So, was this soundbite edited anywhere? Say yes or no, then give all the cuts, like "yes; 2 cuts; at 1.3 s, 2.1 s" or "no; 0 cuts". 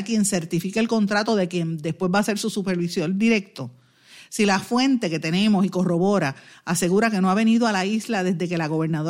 no; 0 cuts